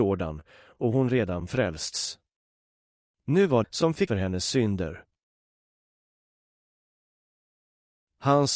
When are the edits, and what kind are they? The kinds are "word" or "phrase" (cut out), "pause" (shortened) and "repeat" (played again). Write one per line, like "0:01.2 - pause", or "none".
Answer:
0:03.6 - phrase
0:04.1 - word